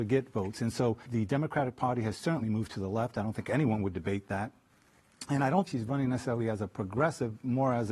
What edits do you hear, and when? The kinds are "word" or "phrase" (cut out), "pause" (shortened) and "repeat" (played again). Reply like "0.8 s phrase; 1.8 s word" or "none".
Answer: 1.1 s word; 5.7 s word